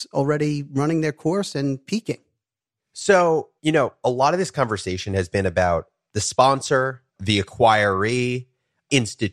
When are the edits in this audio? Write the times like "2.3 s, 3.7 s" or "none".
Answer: 3.6 s, 7.1 s